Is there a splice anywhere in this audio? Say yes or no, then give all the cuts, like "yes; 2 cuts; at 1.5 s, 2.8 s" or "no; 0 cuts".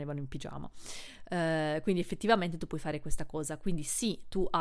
no; 0 cuts